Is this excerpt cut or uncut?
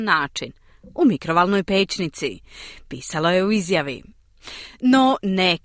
uncut